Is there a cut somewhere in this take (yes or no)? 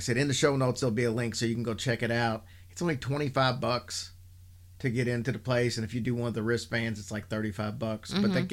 no